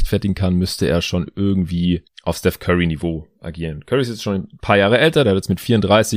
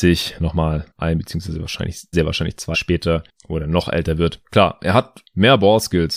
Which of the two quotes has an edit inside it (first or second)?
second